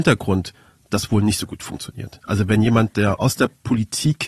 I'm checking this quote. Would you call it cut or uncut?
uncut